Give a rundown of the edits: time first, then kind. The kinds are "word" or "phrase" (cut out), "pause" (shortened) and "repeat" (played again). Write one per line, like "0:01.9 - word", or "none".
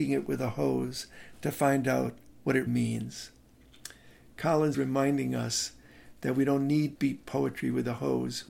0:02.7 - word
0:04.7 - word
0:07.0 - word